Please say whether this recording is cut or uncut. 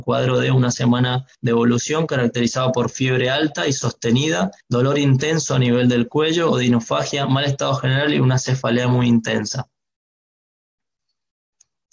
cut